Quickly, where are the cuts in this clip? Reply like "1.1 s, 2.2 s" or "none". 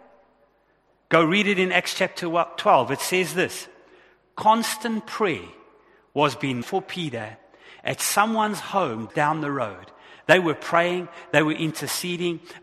6.6 s, 9.1 s